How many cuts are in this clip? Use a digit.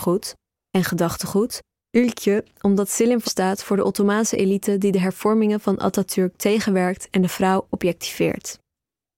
2